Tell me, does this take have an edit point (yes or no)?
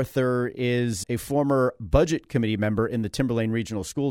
yes